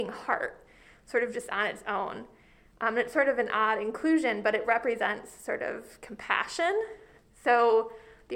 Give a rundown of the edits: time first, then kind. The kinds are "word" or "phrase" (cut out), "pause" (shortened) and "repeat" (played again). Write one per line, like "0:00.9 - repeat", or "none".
none